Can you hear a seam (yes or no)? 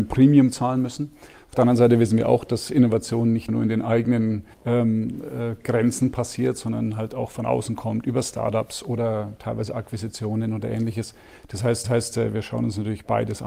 yes